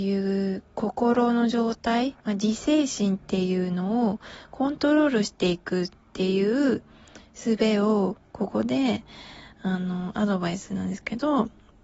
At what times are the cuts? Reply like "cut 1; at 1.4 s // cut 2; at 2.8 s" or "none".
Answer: cut 1; at 2.2 s